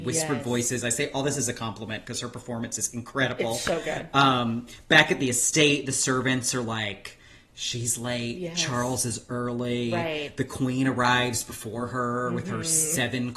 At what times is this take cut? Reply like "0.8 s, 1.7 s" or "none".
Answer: none